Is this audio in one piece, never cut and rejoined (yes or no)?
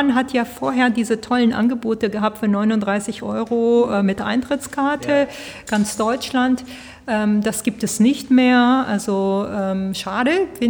yes